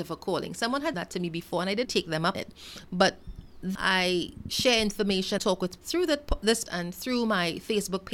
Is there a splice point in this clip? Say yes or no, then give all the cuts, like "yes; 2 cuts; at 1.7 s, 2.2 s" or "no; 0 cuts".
yes; 7 cuts; at 0.9 s, 1.8 s, 2.3 s, 3.7 s, 5.4 s, 5.8 s, 6.6 s